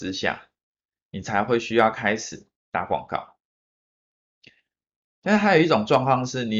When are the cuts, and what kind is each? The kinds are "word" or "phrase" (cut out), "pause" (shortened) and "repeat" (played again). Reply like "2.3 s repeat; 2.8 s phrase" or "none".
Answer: 2.6 s pause